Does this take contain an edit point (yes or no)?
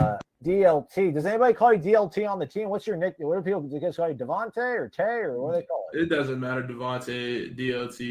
no